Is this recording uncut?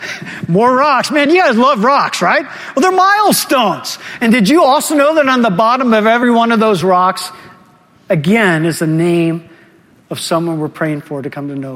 yes; 0 cuts

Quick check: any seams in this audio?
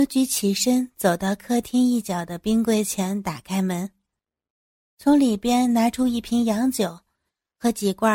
no; 0 cuts

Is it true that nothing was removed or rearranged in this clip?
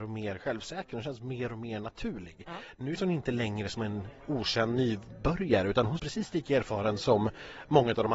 no; 2 cuts; at 3.0 s, 6.0 s

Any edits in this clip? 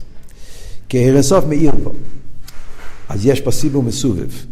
no; 0 cuts

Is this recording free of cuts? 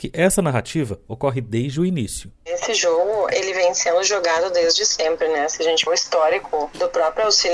no; 1 cut; at 5.9 s

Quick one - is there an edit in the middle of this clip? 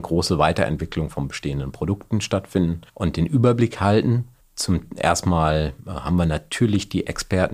no; 0 cuts

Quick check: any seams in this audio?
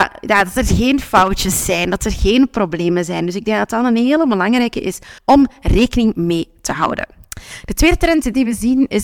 yes; 1 cut; at 5.2 s

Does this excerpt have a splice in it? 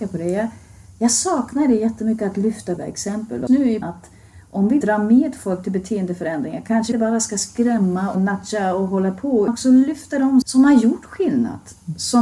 yes; 8 cuts; at 2.8 s, 3.5 s, 3.8 s, 4.8 s, 6.9 s, 8.1 s, 9.5 s, 10.4 s

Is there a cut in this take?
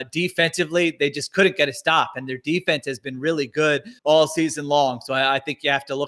yes; 1 cut; at 4.0 s

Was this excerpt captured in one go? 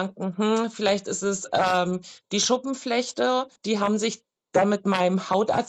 no; 1 cut; at 3.6 s

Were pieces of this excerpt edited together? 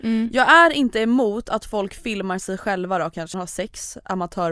yes; 1 cut; at 3.3 s

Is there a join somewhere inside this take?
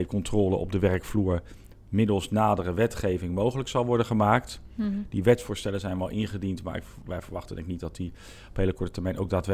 no; 0 cuts

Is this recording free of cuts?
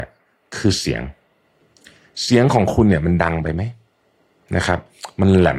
yes; 0 cuts

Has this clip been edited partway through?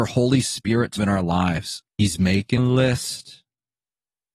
yes; 3 cuts; at 1.0 s, 1.9 s, 2.6 s

